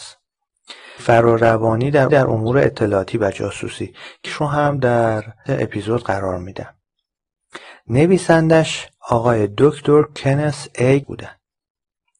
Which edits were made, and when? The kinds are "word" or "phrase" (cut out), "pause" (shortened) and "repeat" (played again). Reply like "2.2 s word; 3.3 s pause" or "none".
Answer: 1.0 s word; 2.1 s repeat; 4.3 s word; 5.5 s word; 9.0 s pause; 11.0 s word